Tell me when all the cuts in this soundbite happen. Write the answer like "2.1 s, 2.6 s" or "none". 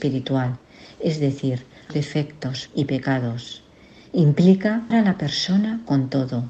1.9 s, 2.7 s, 4.9 s